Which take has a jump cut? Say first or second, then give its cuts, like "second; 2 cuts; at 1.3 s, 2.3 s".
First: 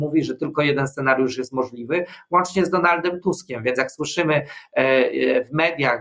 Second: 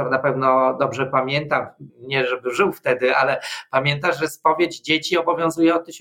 second; 1 cut; at 1.9 s